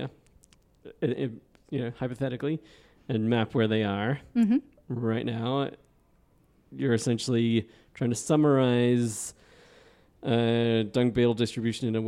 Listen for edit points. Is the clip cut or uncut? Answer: uncut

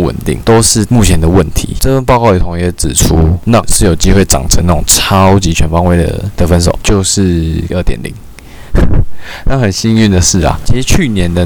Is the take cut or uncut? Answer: cut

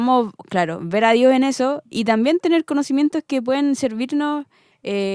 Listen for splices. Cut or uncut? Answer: uncut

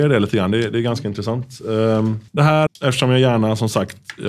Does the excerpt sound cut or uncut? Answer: cut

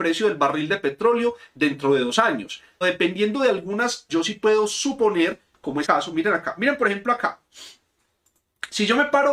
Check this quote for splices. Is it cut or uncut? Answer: cut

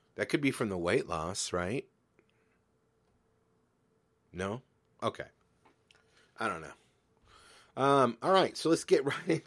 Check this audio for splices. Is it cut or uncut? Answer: uncut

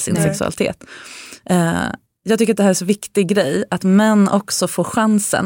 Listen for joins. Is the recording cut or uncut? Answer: uncut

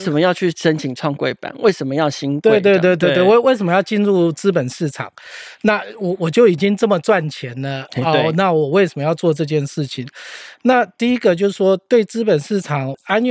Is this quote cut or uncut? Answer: uncut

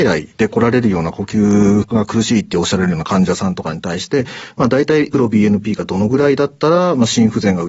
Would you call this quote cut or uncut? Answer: cut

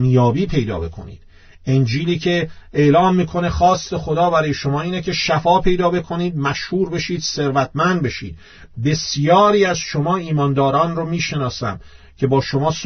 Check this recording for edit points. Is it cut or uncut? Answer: uncut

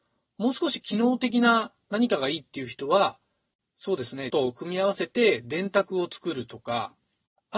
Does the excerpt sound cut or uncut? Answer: cut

